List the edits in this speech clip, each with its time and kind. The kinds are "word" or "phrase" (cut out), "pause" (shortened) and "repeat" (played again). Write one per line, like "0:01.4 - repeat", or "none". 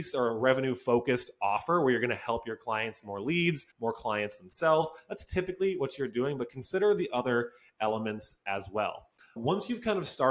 0:03.0 - word
0:03.7 - pause
0:09.4 - word